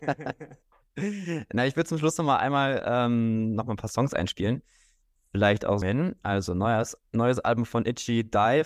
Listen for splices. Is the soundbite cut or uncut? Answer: cut